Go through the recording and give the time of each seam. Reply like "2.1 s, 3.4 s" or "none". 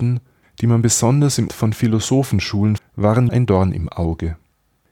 1.5 s, 2.8 s, 3.3 s